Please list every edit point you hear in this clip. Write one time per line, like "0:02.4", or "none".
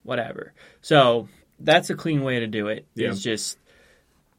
0:01.4